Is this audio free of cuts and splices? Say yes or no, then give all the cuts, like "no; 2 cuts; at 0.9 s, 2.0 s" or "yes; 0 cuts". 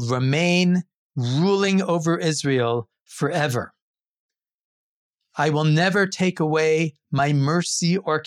yes; 0 cuts